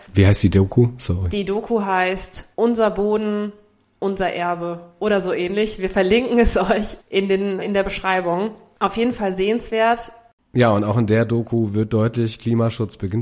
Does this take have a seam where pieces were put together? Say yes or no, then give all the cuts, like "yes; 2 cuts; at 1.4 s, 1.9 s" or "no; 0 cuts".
yes; 3 cuts; at 2.5 s, 7.0 s, 7.6 s